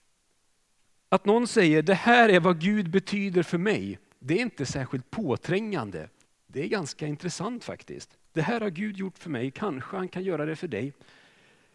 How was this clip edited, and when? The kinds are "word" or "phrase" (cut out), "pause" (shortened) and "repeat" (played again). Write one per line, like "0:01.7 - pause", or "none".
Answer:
0:06.3 - pause
0:08.2 - pause